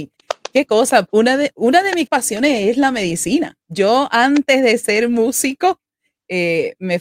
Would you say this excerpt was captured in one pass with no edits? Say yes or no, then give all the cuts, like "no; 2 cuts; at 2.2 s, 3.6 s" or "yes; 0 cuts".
no; 4 cuts; at 1.1 s, 1.5 s, 2.1 s, 3.6 s